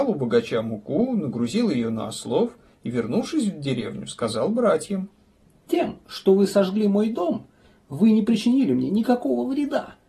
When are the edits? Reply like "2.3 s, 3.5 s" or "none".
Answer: none